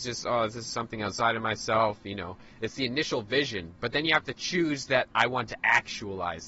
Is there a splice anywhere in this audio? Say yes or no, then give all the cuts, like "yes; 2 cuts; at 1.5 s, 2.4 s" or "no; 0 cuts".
no; 0 cuts